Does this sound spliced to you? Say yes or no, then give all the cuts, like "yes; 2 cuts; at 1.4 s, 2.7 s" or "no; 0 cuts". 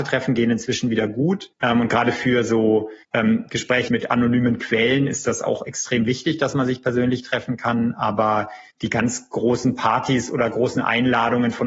yes; 4 cuts; at 1.5 s, 3.0 s, 3.9 s, 8.7 s